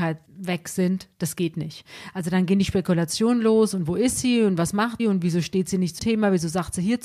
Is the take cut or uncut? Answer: cut